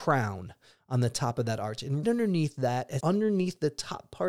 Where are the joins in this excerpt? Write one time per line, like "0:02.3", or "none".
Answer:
0:02.0
0:03.0

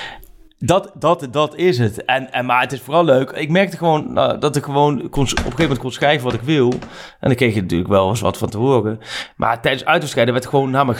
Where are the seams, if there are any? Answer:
none

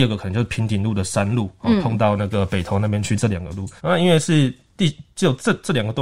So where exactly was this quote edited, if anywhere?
0:03.8

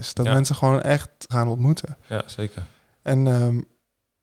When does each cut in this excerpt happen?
0:01.3

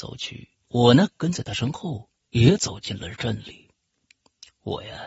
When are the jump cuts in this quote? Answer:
none

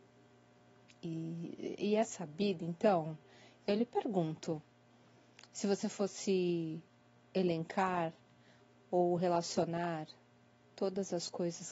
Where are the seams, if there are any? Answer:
none

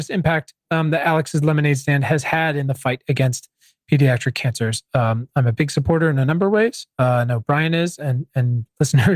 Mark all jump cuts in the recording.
none

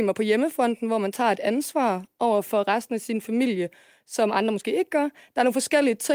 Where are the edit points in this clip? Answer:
none

